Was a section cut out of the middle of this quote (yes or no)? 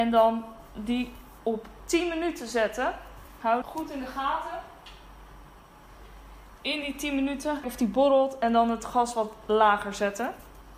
yes